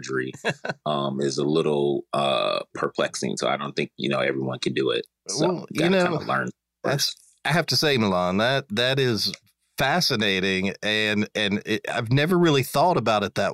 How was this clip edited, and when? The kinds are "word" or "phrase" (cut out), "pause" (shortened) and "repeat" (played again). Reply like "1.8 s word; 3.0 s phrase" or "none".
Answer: none